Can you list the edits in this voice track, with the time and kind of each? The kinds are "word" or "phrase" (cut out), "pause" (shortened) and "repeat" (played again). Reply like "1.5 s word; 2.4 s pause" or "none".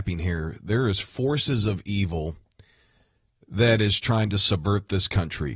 none